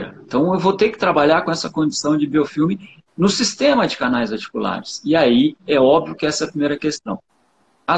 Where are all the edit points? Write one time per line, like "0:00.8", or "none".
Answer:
none